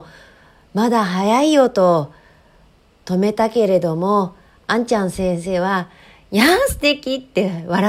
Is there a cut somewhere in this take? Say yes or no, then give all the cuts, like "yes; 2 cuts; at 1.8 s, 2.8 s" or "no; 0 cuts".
no; 0 cuts